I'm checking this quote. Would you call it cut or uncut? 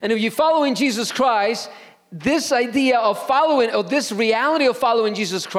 uncut